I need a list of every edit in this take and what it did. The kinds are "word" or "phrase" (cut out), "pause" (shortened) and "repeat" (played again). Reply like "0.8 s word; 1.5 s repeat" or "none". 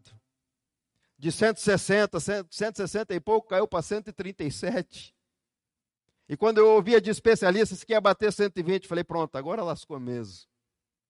none